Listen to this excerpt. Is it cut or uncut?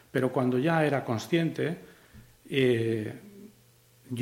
uncut